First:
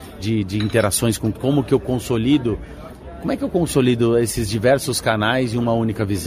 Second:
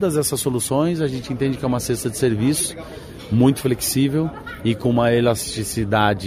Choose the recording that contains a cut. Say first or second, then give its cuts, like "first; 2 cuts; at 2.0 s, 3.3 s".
first; 1 cut; at 1.3 s